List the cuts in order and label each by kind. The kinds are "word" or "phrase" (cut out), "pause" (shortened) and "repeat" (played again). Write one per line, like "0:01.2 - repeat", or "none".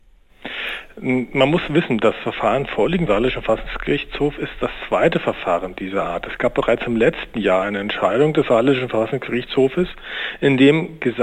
0:03.1 - word